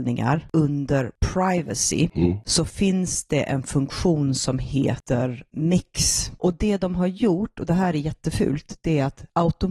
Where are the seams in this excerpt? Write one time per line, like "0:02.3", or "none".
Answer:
none